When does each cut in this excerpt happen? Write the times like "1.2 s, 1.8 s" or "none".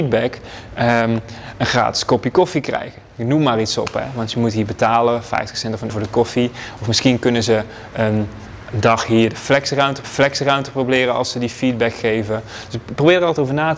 5.9 s, 10.0 s